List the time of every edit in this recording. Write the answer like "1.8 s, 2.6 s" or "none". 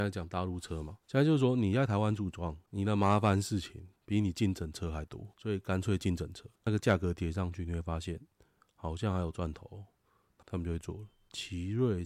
1.0 s, 2.6 s, 4.0 s, 5.3 s, 6.6 s